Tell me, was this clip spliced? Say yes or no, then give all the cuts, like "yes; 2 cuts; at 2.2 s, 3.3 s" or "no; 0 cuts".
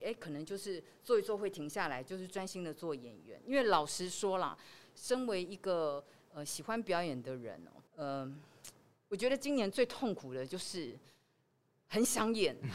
yes; 1 cut; at 7.9 s